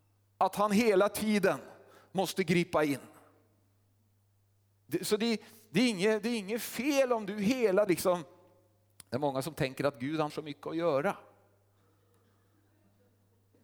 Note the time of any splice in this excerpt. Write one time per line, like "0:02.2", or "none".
0:07.9
0:10.3